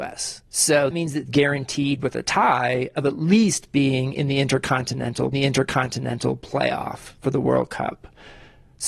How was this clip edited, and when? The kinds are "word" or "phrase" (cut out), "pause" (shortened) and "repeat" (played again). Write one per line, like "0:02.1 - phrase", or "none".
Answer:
0:00.9 - word
0:01.3 - phrase
0:05.3 - repeat